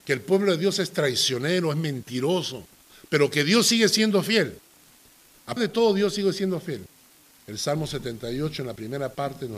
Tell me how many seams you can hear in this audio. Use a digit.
1